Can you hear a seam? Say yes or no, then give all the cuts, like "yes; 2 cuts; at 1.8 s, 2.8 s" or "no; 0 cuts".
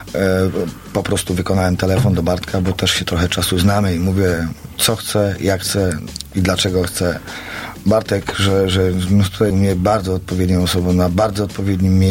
yes; 1 cut; at 9.5 s